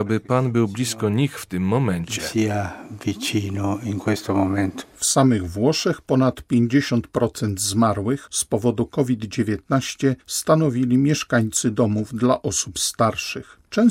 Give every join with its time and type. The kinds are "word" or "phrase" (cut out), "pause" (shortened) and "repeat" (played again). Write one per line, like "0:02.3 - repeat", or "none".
0:10.2 - pause